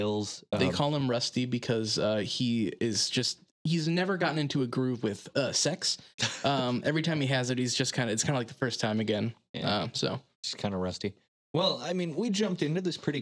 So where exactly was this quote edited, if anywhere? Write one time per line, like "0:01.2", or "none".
none